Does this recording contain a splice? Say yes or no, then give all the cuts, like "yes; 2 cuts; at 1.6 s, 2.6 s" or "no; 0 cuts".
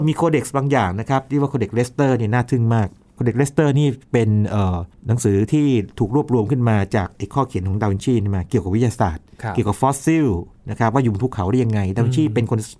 no; 0 cuts